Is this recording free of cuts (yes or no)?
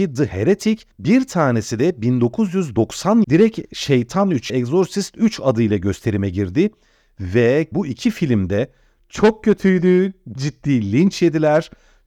no